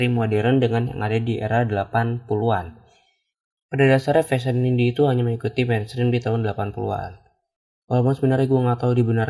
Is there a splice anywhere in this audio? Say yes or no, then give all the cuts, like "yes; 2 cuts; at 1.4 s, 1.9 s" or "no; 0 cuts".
no; 0 cuts